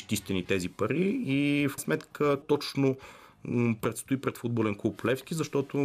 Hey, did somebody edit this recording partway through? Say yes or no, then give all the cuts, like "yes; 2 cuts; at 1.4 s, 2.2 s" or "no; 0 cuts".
yes; 2 cuts; at 1.8 s, 2.4 s